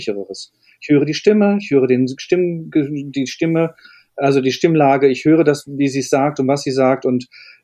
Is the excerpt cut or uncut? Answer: uncut